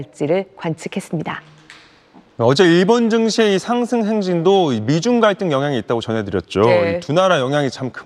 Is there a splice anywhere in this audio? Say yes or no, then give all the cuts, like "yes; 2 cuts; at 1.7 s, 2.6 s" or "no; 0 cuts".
no; 0 cuts